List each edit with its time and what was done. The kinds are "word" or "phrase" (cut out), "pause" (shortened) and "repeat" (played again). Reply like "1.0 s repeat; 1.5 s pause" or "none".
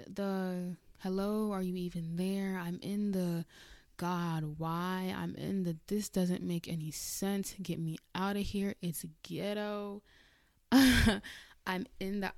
none